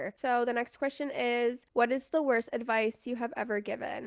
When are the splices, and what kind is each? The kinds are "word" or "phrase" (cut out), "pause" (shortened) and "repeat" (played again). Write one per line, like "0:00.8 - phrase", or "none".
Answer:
0:01.7 - pause